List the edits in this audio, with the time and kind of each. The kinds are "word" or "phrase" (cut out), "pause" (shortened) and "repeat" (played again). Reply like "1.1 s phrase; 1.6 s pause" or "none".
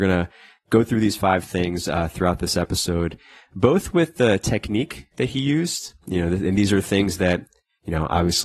none